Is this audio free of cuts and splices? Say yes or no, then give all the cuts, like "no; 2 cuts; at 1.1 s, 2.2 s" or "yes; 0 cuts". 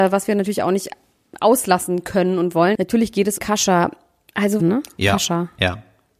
no; 2 cuts; at 3.4 s, 4.6 s